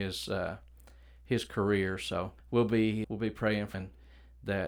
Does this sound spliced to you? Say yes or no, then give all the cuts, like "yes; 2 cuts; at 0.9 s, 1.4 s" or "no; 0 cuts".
yes; 3 cuts; at 2.4 s, 3.0 s, 3.7 s